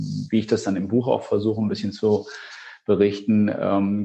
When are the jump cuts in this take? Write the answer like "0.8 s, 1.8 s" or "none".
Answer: none